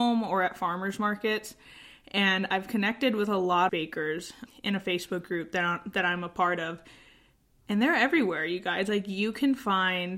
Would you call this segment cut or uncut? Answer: cut